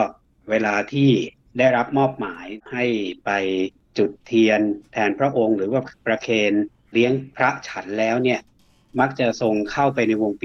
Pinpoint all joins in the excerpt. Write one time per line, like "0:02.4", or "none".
none